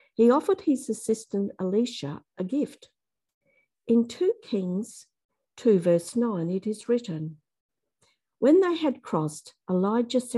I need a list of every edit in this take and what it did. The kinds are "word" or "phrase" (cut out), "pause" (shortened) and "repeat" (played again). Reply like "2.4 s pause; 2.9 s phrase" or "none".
none